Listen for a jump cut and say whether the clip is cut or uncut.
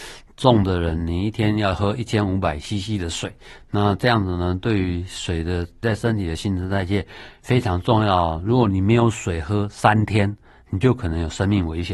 uncut